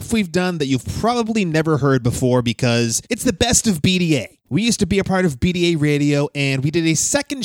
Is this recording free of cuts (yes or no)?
no